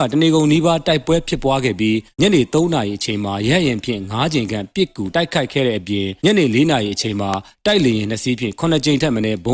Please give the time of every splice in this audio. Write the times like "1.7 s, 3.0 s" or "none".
2.1 s, 6.2 s